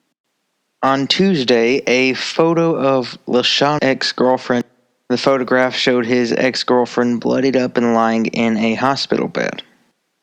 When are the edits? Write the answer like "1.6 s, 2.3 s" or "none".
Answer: 3.8 s